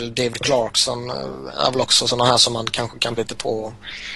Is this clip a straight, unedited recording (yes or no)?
no